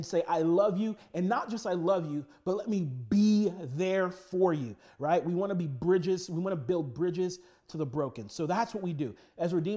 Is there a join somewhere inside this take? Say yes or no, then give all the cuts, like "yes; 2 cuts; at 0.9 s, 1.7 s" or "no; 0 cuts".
no; 0 cuts